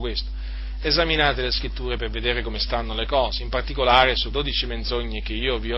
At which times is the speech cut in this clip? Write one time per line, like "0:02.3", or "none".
0:04.3